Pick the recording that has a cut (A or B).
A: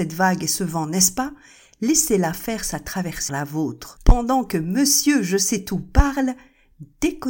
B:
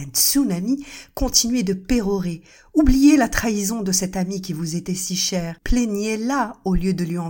A